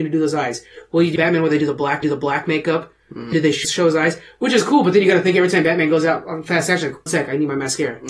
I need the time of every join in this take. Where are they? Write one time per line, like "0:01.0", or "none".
0:01.2
0:02.0
0:03.3
0:03.6
0:07.1